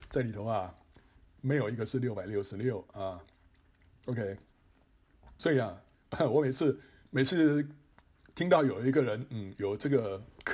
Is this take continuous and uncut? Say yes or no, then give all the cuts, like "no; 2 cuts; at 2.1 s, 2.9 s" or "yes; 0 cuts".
yes; 0 cuts